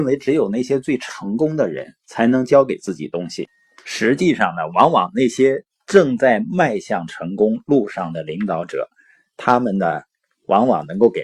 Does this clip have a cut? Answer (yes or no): no